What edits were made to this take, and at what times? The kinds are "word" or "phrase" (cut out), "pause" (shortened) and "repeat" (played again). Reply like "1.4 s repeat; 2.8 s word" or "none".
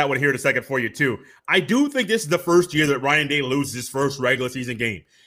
none